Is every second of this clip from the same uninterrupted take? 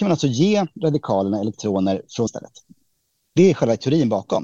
no; 1 cut; at 2.3 s

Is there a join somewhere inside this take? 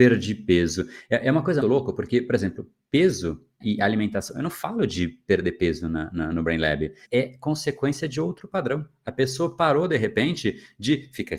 yes; 3 cuts; at 1.6 s, 3.6 s, 7.0 s

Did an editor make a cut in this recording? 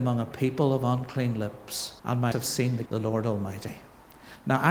yes; 3 cuts; at 2.0 s, 2.3 s, 2.9 s

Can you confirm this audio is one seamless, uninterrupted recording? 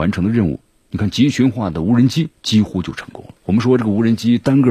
no; 2 cuts; at 2.3 s, 3.4 s

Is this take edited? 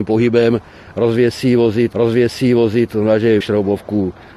yes; 2 cuts; at 1.9 s, 3.4 s

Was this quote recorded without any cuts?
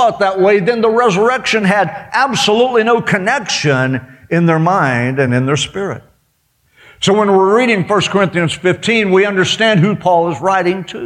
yes; 0 cuts

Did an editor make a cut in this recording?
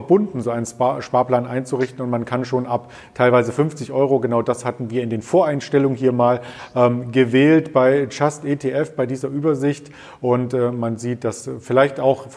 no; 0 cuts

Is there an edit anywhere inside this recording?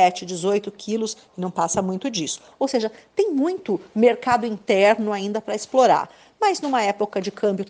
no; 0 cuts

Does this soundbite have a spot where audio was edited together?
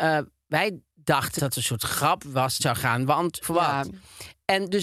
yes; 3 cuts; at 1.4 s, 2.6 s, 3.4 s

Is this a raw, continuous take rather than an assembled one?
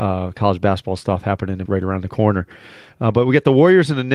no; 1 cut; at 1.7 s

